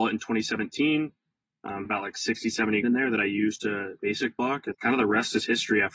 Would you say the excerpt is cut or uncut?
cut